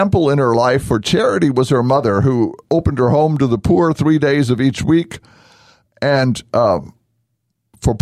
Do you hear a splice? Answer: no; 0 cuts

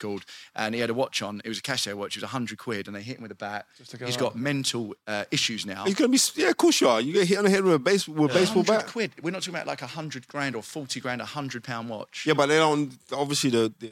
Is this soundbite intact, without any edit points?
yes; 0 cuts

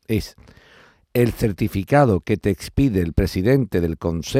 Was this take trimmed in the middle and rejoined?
no; 0 cuts

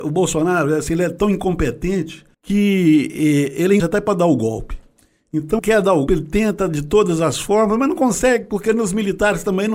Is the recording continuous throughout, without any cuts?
no; 4 cuts; at 2.3 s, 3.8 s, 5.6 s, 6.1 s

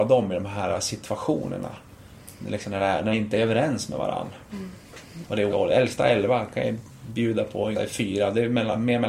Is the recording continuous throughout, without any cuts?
no; 3 cuts; at 3.1 s, 5.5 s, 7.7 s

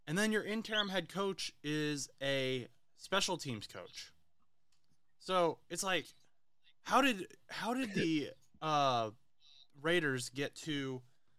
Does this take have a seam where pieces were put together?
no; 0 cuts

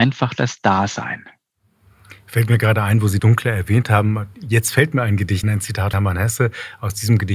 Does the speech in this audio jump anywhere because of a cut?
yes; 3 cuts; at 3.2 s, 5.4 s, 5.9 s

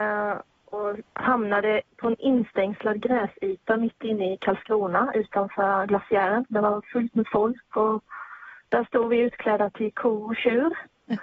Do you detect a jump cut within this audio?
no; 0 cuts

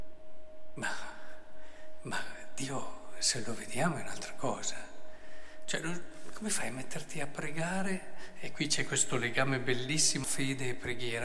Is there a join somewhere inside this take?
yes; 1 cut; at 10.2 s

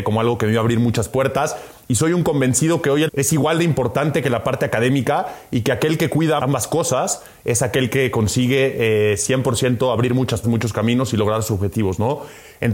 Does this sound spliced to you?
yes; 3 cuts; at 3.1 s, 6.4 s, 10.4 s

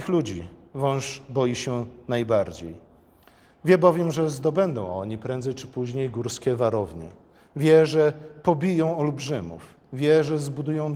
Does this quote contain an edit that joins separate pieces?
no; 0 cuts

